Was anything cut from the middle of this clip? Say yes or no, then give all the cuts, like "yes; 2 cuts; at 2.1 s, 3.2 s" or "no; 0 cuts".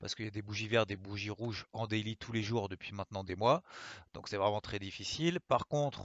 no; 0 cuts